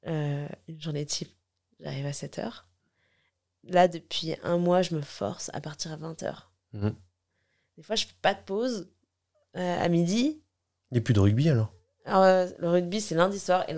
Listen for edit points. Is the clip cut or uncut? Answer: uncut